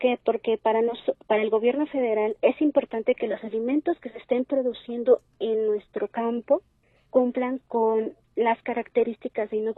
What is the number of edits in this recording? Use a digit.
2